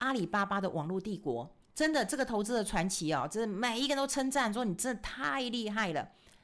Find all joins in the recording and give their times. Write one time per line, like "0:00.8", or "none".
0:01.6